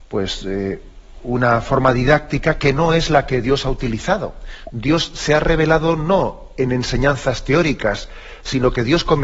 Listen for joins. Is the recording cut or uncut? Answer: uncut